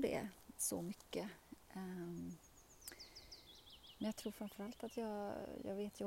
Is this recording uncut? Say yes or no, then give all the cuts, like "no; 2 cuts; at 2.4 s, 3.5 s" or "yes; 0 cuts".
yes; 0 cuts